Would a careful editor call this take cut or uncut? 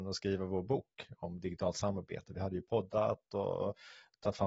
uncut